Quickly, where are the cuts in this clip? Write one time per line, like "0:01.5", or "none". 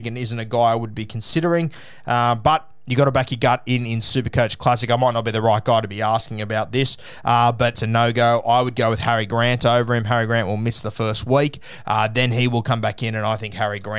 0:07.7